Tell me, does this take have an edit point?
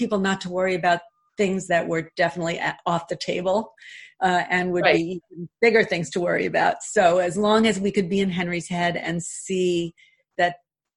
no; 0 cuts

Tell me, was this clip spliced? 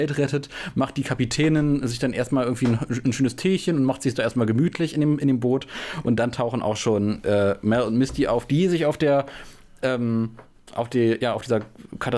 no; 0 cuts

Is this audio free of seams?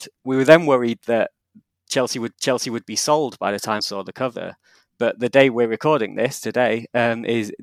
no; 2 cuts; at 2.3 s, 3.8 s

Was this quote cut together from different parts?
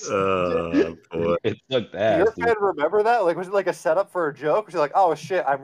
no; 0 cuts

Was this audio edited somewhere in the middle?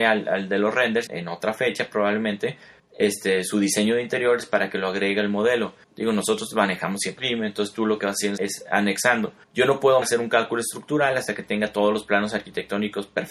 yes; 7 cuts; at 1.1 s, 2.8 s, 5.8 s, 7.2 s, 8.4 s, 9.4 s, 10.0 s

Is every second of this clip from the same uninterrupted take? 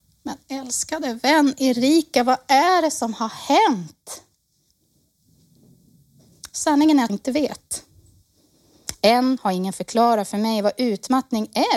no; 1 cut; at 7.1 s

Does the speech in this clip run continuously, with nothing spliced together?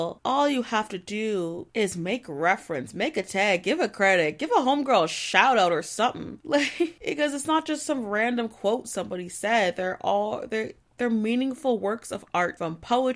yes; 0 cuts

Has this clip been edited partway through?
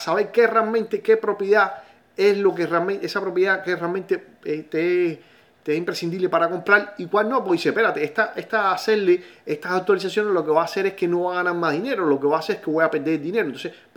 no; 0 cuts

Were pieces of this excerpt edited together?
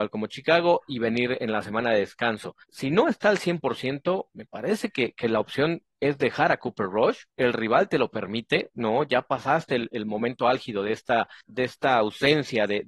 yes; 3 cuts; at 2.6 s, 7.3 s, 11.4 s

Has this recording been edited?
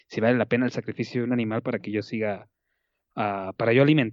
no; 0 cuts

